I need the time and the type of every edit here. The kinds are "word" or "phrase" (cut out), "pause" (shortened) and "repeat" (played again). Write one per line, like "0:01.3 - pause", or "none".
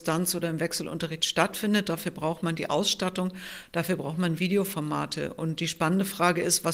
none